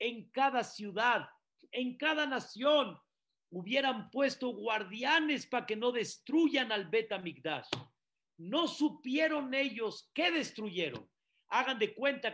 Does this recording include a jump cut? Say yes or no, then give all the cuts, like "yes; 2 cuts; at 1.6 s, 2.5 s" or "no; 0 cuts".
no; 0 cuts